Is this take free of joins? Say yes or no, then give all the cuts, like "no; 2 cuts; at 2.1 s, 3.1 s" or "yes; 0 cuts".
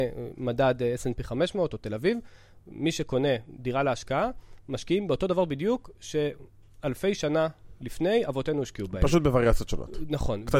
yes; 0 cuts